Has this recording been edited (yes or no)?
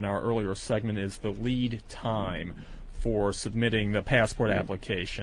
no